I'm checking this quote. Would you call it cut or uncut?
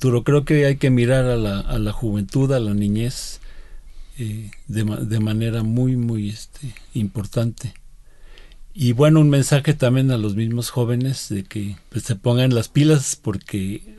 cut